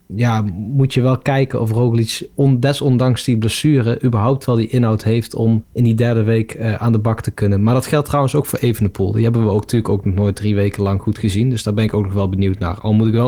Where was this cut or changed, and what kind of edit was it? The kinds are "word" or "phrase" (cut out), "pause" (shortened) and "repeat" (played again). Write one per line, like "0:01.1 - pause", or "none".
0:05.7 - pause